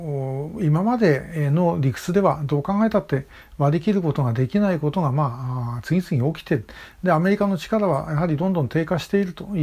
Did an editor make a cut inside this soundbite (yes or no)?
no